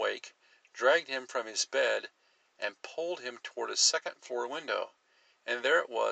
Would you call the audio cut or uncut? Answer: uncut